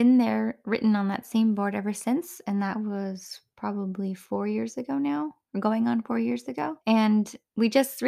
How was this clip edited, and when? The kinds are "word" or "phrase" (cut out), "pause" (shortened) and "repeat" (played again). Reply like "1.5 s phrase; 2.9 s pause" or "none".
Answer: 6.8 s pause